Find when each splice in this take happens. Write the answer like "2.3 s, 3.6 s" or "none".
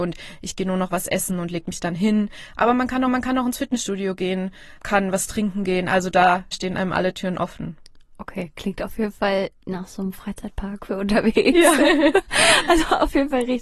3.1 s, 4.8 s, 6.5 s